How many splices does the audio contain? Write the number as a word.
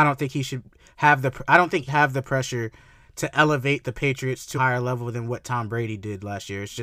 two